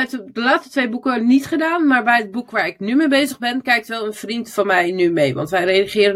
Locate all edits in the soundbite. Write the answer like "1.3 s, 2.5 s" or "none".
none